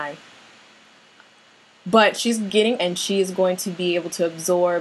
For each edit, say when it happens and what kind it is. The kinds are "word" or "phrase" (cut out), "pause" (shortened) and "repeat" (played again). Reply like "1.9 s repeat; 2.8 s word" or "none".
2.8 s word

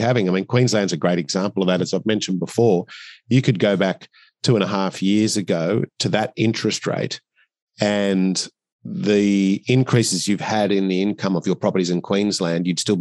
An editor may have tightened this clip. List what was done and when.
none

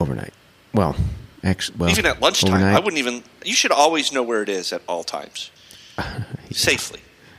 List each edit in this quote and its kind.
1.4 s pause; 5.6 s pause

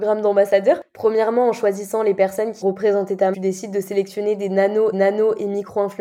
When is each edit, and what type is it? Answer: 2.6 s word; 3.3 s phrase; 4.9 s repeat

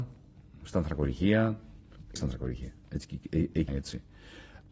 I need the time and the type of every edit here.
2.2 s word; 3.7 s word

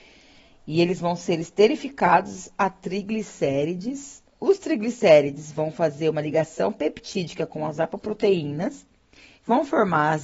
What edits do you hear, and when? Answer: 4.3 s pause

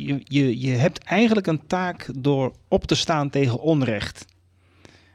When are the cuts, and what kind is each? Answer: none

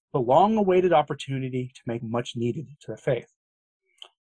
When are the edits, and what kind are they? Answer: 2.0 s phrase; 2.8 s word

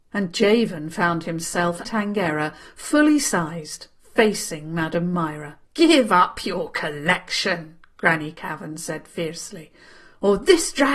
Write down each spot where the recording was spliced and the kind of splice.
1.8 s word; 5.7 s pause

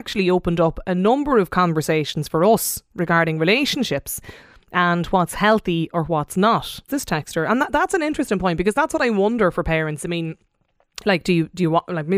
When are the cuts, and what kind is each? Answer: 6.9 s word

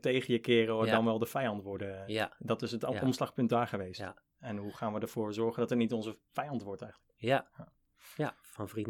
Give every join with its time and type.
none

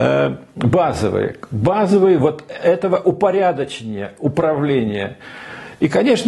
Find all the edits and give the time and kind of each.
none

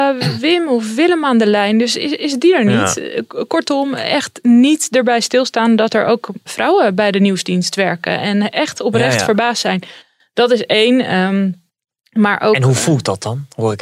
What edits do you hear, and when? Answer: none

